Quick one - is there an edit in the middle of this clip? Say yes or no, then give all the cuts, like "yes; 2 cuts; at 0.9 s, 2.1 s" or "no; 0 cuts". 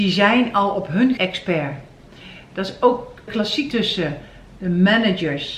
yes; 3 cuts; at 1.2 s, 3.3 s, 3.7 s